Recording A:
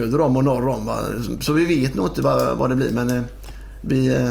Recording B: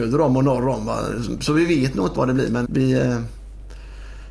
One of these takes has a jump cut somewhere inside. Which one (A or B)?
B